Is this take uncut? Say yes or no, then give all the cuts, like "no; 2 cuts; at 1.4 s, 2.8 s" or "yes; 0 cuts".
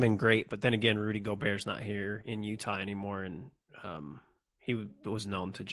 yes; 0 cuts